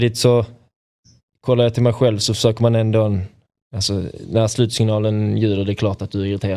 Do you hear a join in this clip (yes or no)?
no